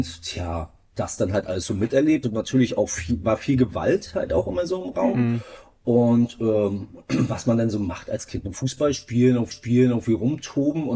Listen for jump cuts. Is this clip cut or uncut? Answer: cut